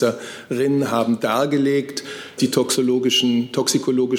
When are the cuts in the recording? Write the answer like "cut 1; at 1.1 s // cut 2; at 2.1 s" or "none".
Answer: cut 1; at 2.4 s

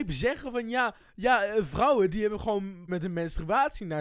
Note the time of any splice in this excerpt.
cut 1; at 2.9 s

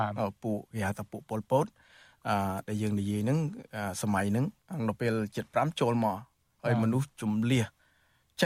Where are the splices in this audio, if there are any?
cut 1; at 4.6 s

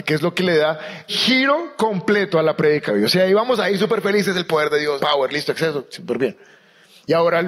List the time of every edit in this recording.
cut 1; at 1.1 s // cut 2; at 2.9 s // cut 3; at 5.0 s

